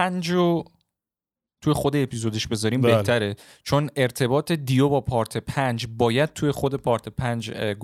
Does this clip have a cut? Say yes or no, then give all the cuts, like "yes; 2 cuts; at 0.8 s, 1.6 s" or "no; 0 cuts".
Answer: no; 0 cuts